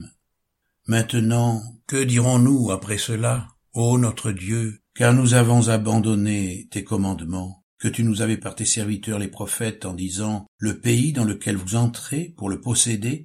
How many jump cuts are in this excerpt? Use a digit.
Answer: 4